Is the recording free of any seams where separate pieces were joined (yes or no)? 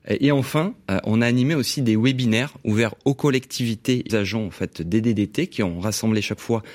no